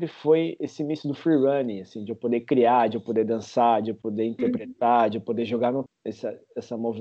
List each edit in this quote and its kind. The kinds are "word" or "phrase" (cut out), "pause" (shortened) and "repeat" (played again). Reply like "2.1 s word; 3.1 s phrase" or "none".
5.9 s word